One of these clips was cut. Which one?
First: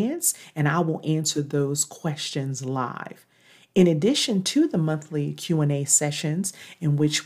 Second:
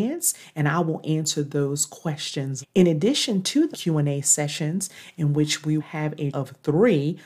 second; 4 cuts; at 2.6 s, 3.7 s, 5.8 s, 6.3 s

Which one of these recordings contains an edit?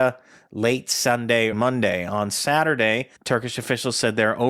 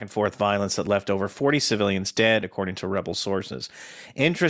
first; 2 cuts; at 1.5 s, 3.2 s

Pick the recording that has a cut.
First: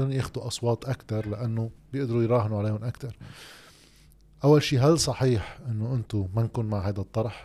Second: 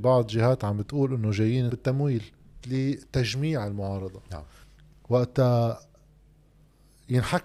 second; 3 cuts; at 1.7 s, 2.6 s, 4.6 s

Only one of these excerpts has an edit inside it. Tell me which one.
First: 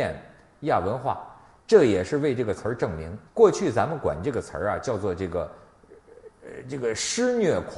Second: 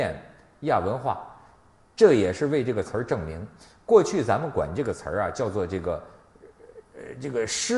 first; 2 cuts; at 1.6 s, 3.3 s

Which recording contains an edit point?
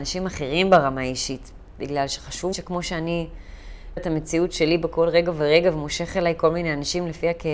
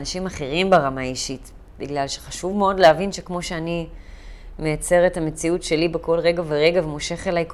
first; 2 cuts; at 2.5 s, 4.0 s

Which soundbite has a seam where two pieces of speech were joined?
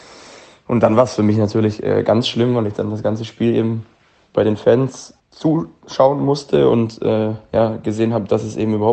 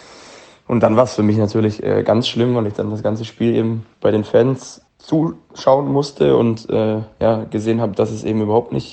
second; 1 cut; at 3.9 s

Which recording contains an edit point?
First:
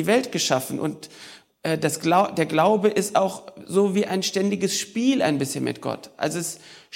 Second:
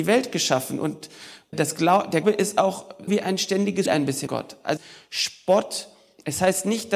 second; 6 cuts; at 1.5 s, 2.2 s, 3.1 s, 3.9 s, 4.3 s, 4.8 s

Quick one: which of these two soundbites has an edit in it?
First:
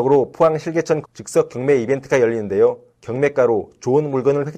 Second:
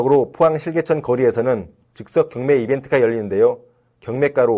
first; 2 cuts; at 1.0 s, 2.9 s

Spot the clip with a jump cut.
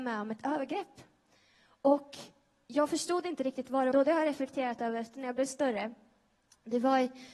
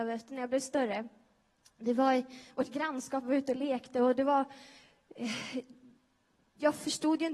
first; 1 cut; at 3.9 s

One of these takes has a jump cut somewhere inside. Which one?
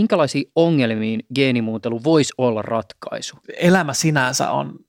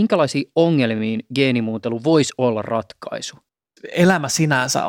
first; 1 cut; at 3.4 s

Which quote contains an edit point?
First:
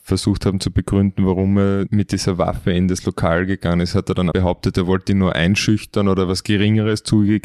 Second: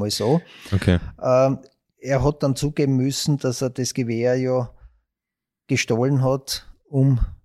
first; 1 cut; at 4.3 s

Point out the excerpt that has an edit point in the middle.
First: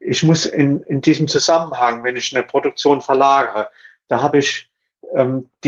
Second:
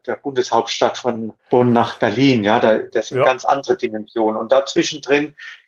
second; 1 cut; at 1.4 s

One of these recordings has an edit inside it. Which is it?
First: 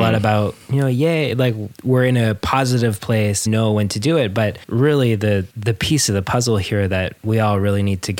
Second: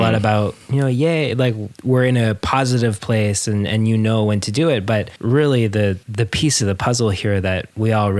first; 1 cut; at 3.5 s

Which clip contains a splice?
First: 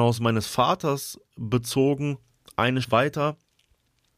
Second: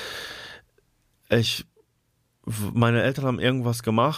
first; 1 cut; at 2.8 s

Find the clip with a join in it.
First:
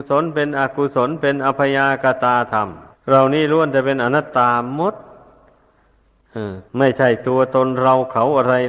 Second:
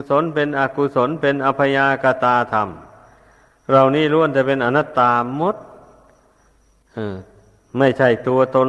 first; 2 cuts; at 2.9 s, 6.7 s

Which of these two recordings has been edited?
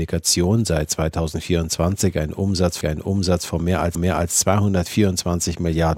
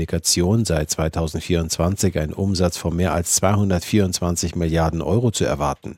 first; 2 cuts; at 2.8 s, 3.9 s

